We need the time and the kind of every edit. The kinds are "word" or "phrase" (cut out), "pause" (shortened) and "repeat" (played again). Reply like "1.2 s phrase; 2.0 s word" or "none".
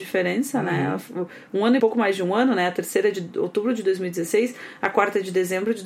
1.8 s phrase